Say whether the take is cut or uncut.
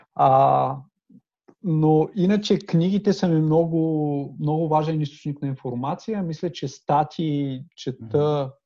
cut